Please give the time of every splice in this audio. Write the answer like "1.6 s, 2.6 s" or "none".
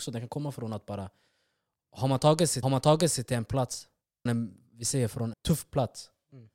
2.6 s, 4.3 s, 5.3 s